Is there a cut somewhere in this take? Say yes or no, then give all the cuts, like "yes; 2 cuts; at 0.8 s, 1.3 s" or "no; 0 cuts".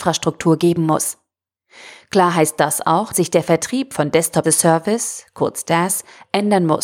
yes; 2 cuts; at 3.1 s, 4.4 s